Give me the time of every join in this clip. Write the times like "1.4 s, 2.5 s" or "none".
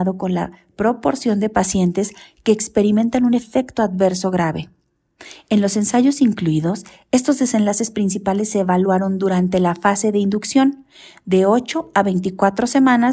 none